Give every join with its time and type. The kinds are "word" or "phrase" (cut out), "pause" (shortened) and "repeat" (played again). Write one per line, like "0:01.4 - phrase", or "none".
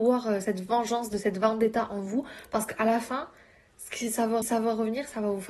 0:04.4 - repeat